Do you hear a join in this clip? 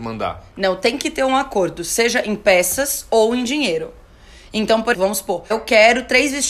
yes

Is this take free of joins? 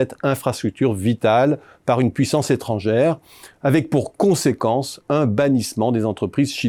yes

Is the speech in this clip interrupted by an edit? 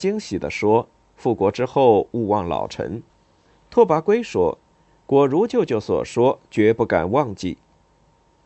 yes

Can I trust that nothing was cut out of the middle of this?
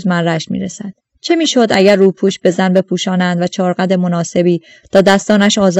yes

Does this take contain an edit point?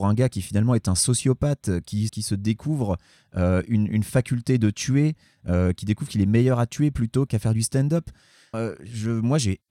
yes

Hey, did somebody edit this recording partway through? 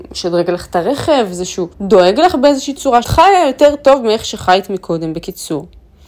yes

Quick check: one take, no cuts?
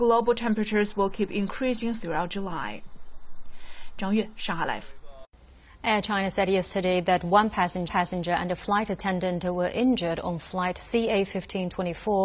no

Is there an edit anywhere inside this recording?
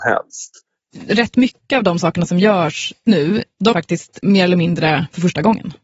yes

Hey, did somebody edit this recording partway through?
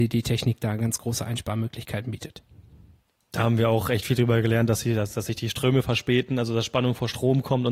no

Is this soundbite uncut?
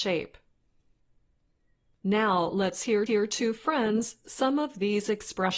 no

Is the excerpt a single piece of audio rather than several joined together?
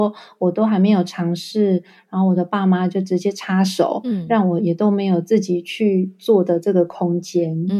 yes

